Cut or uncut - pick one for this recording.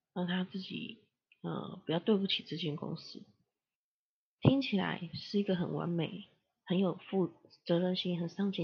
uncut